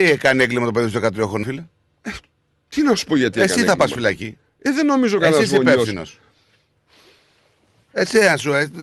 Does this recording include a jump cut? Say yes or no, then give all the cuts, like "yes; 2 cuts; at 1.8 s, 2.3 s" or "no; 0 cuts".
yes; 1 cut; at 1.4 s